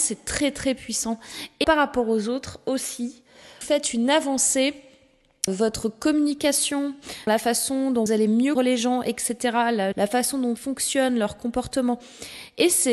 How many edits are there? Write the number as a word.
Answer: eight